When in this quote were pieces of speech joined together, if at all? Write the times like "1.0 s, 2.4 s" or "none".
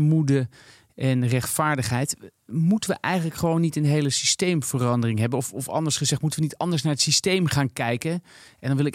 none